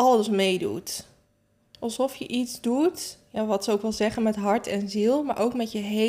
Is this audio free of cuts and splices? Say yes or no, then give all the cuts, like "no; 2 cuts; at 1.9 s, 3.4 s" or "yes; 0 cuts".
yes; 0 cuts